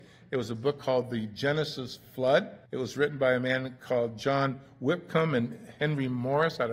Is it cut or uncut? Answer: cut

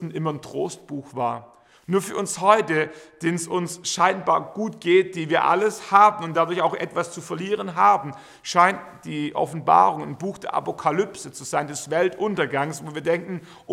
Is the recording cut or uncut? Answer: uncut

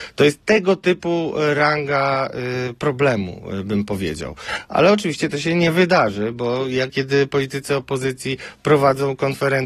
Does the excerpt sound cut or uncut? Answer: cut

